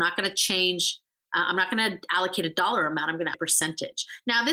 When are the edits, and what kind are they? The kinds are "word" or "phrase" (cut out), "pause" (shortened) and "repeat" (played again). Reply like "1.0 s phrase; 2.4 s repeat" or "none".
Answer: 3.3 s word